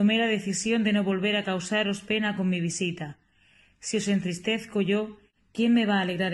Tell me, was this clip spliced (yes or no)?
no